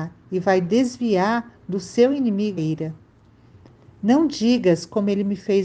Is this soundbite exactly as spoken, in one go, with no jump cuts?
no; 1 cut; at 2.6 s

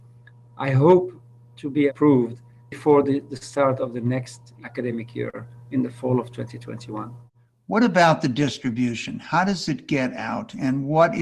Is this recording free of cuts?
yes; 0 cuts

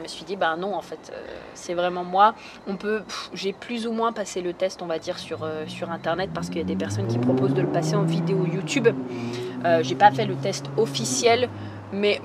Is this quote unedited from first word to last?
yes; 0 cuts

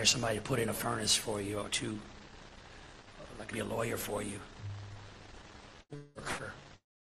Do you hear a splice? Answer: yes; 2 cuts; at 1.7 s, 3.5 s

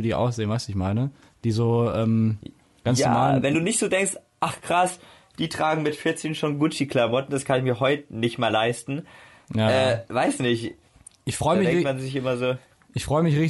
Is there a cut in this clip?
no; 0 cuts

